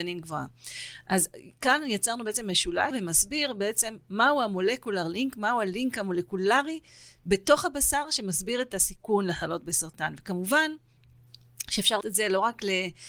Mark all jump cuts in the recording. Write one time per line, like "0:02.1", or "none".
0:02.9
0:12.0